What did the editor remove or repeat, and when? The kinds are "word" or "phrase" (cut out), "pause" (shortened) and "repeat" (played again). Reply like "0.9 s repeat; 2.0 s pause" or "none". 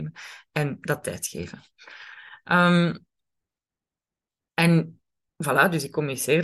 none